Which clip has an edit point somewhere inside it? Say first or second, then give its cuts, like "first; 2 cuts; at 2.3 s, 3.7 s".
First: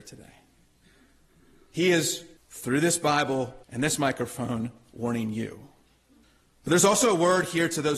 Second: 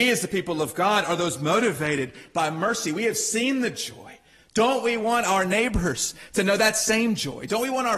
first; 3 cuts; at 2.4 s, 3.6 s, 6.2 s